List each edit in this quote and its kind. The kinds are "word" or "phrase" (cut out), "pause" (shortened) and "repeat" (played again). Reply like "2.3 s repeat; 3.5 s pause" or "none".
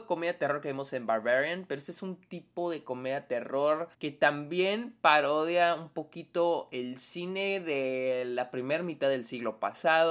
3.9 s pause